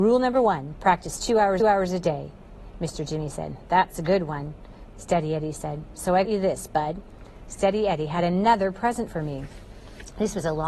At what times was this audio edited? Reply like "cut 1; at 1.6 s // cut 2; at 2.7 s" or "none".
cut 1; at 1.6 s // cut 2; at 6.2 s